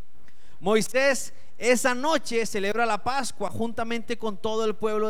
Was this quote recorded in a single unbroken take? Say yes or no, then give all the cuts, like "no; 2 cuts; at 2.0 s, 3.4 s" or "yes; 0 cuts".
yes; 0 cuts